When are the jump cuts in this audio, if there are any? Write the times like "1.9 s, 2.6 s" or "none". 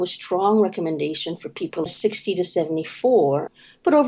1.8 s